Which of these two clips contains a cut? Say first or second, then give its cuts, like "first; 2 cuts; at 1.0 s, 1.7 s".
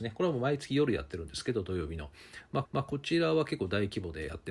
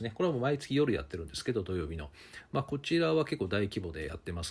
first; 1 cut; at 2.6 s